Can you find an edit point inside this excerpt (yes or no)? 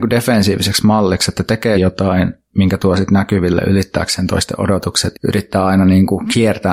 yes